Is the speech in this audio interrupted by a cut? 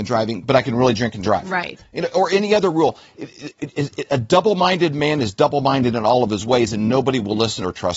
no; 0 cuts

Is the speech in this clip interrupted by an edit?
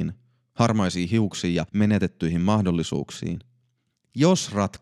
yes; 1 cut; at 1.7 s

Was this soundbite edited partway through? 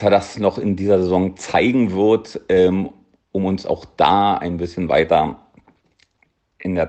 no; 0 cuts

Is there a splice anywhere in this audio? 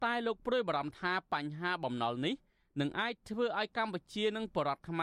no; 0 cuts

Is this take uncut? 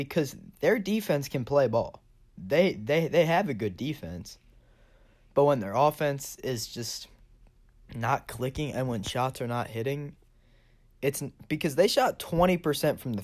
yes; 0 cuts

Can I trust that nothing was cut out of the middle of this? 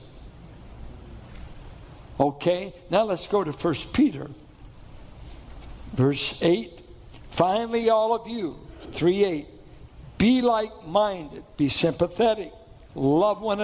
yes; 0 cuts

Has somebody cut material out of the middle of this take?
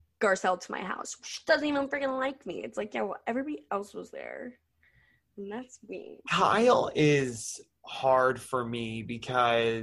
no; 0 cuts

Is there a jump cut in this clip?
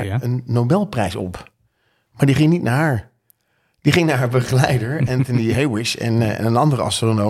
no; 0 cuts

